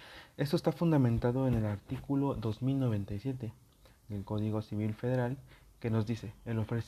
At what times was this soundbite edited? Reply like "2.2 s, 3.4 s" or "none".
none